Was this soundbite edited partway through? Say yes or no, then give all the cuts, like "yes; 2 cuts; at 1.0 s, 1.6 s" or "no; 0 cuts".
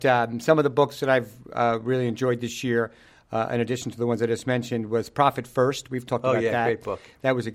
no; 0 cuts